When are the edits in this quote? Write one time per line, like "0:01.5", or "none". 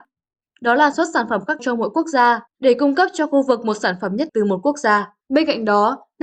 0:00.9
0:01.6
0:02.5
0:04.3
0:05.2